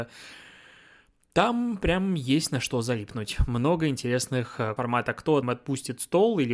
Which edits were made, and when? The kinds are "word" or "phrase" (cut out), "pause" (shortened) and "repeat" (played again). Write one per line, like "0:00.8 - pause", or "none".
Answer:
0:04.8 - word
0:05.4 - phrase